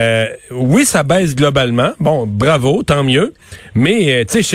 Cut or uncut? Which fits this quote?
uncut